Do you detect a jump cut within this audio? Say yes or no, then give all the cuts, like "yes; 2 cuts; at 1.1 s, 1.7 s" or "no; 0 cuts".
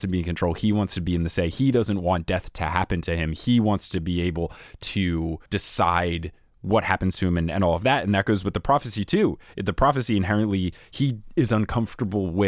yes; 1 cut; at 5.5 s